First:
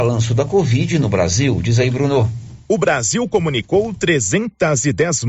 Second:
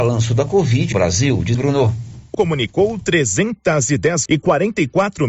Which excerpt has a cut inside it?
second; 4 cuts; at 0.9 s, 1.5 s, 2.3 s, 4.3 s

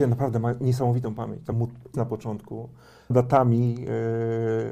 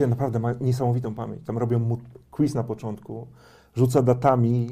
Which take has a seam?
first; 3 cuts; at 1.5 s, 1.9 s, 3.1 s

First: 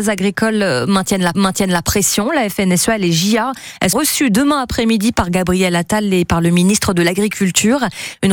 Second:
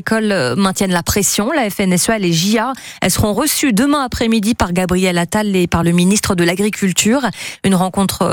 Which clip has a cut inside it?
first; 2 cuts; at 1.3 s, 3.9 s

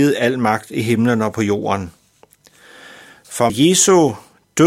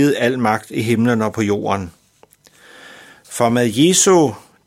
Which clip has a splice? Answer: first; 1 cut; at 3.5 s

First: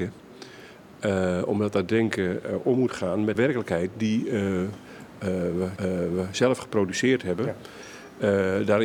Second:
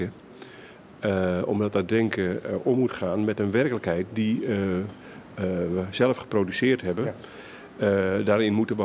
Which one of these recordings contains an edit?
first; 2 cuts; at 3.3 s, 5.8 s

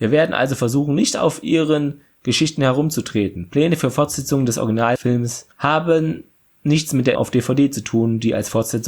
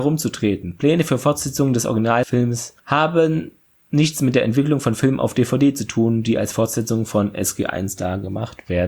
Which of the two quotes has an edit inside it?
first; 1 cut; at 7.2 s

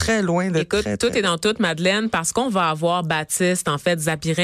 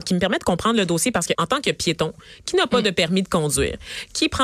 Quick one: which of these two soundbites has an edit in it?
second; 1 cut; at 1.3 s

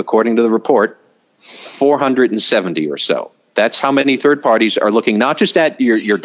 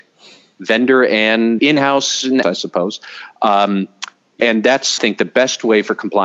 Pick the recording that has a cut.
second; 4 cuts; at 1.6 s, 2.4 s, 4.4 s, 5.0 s

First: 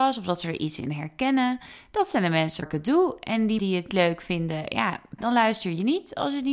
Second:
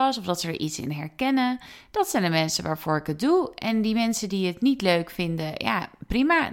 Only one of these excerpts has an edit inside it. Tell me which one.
first; 4 cuts; at 2.6 s, 3.6 s, 3.9 s, 5.2 s

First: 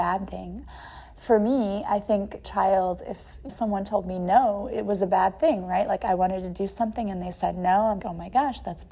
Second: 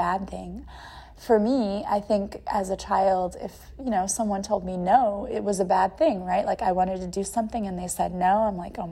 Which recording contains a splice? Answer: first; 3 cuts; at 2.4 s, 3.5 s, 8.0 s

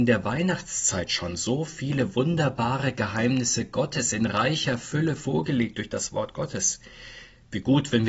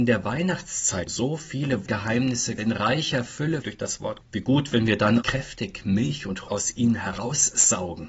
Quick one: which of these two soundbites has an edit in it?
second; 7 cuts; at 1.1 s, 1.9 s, 2.6 s, 3.6 s, 4.2 s, 5.2 s, 6.5 s

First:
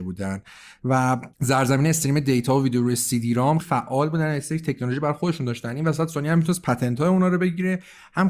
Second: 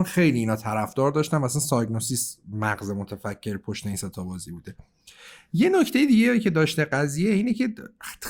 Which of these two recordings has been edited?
first; 2 cuts; at 1.3 s, 3.6 s

